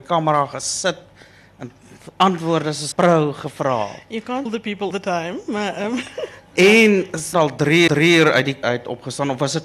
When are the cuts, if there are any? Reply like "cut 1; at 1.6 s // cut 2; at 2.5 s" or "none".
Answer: cut 1; at 2.9 s // cut 2; at 4.5 s // cut 3; at 4.9 s // cut 4; at 7.3 s // cut 5; at 7.9 s // cut 6; at 8.6 s